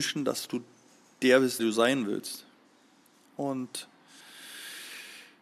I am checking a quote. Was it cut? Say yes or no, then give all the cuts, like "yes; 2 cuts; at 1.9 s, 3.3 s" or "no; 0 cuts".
yes; 1 cut; at 1.6 s